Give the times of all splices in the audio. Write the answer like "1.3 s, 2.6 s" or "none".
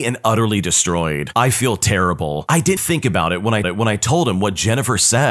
2.8 s, 3.6 s